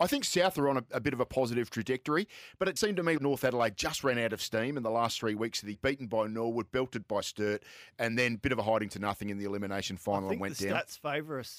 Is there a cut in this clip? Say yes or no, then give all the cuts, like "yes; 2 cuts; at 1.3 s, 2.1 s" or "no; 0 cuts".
yes; 3 cuts; at 2.8 s, 3.2 s, 5.7 s